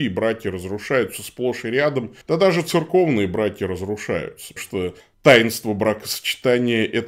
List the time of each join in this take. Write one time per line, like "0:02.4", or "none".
0:02.2
0:04.6
0:05.0